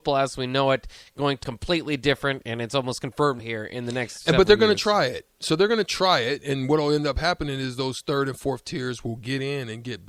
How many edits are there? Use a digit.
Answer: 2